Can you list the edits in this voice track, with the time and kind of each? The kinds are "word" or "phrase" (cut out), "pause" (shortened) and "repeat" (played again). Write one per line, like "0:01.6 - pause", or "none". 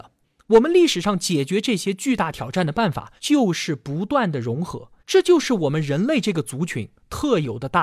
0:03.2 - pause
0:05.0 - pause

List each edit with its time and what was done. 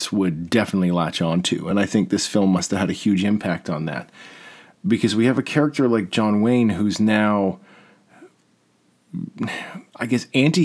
none

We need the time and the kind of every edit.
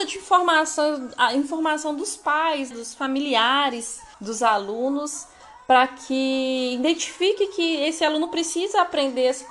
0:02.7 - word
0:04.1 - pause

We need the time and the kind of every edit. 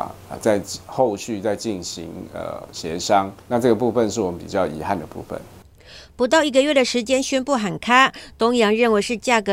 0:03.4 - pause

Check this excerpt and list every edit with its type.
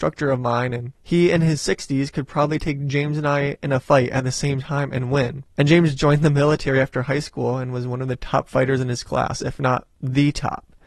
0:00.9 - pause
0:05.5 - pause

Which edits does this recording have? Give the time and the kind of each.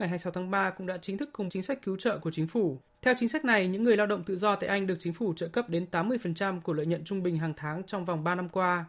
0:01.5 - phrase

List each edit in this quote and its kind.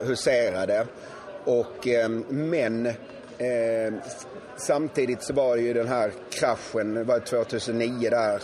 none

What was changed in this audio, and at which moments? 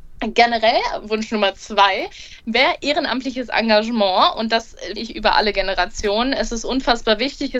0:05.0 - word

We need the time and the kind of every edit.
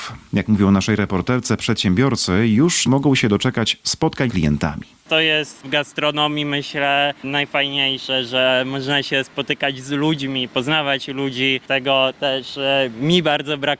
0:02.9 - word
0:04.3 - phrase
0:05.6 - word
0:07.2 - pause

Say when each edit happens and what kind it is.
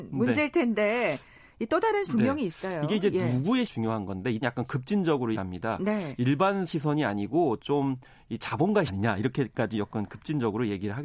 0:02.1 - word
0:03.7 - word
0:04.4 - word
0:05.3 - word
0:06.7 - word
0:08.9 - word

